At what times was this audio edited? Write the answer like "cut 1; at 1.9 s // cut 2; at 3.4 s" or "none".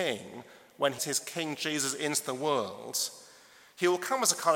cut 1; at 1.0 s